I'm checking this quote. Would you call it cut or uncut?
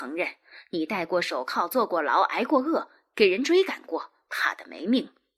uncut